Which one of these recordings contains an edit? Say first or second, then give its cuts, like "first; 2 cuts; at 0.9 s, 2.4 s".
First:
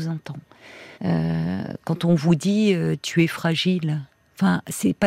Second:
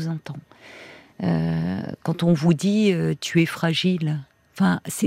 first; 1 cut; at 0.9 s